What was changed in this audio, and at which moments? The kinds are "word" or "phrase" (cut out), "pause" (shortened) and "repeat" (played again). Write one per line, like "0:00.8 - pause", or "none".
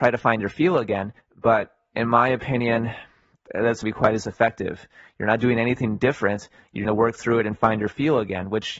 0:01.2 - pause
0:03.8 - phrase
0:06.8 - phrase